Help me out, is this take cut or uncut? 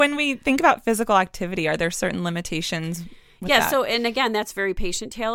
uncut